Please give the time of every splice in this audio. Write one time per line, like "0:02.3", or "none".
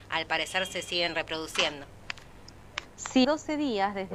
0:03.2

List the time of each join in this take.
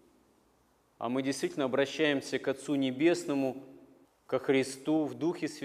0:04.0

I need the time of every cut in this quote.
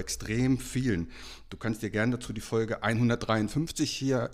none

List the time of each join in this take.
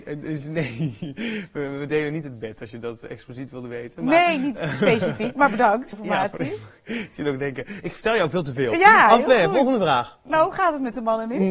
0:05.9

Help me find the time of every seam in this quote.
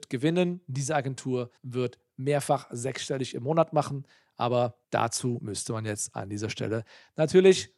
0:01.6
0:04.8

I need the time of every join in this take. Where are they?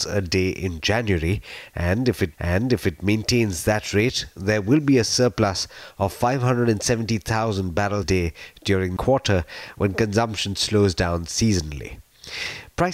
0:02.3
0:08.0
0:09.0

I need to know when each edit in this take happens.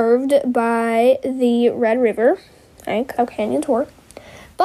0:03.2

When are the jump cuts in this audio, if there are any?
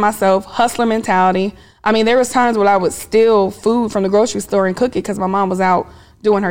none

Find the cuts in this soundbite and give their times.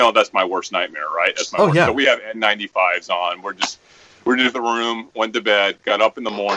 0:04.5

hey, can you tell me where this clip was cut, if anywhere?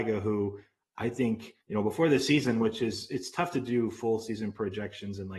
0:01.6

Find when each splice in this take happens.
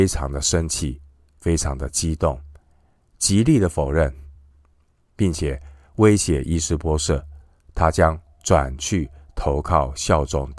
none

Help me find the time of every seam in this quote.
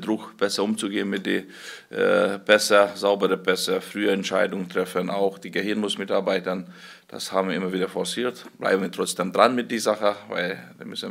none

